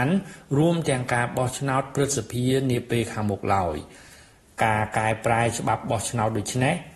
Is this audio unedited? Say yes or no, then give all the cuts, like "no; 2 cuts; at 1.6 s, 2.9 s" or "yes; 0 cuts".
yes; 0 cuts